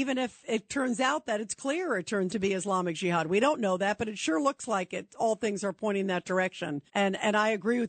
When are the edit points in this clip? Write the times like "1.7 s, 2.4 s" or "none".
2.3 s, 6.9 s